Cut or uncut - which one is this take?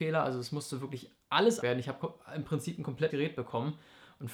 cut